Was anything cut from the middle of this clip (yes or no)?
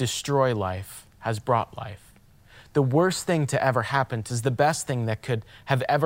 yes